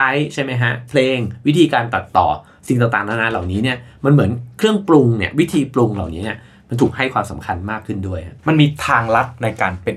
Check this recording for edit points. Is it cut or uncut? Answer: cut